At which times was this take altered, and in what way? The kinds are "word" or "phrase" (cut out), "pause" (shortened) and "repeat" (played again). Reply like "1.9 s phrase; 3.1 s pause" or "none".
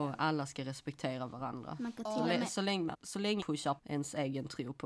2.9 s word; 3.4 s phrase; 3.8 s word